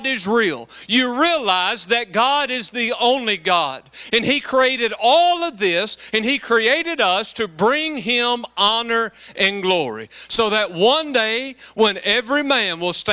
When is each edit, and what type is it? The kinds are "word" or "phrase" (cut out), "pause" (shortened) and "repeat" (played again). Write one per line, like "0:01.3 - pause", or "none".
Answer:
none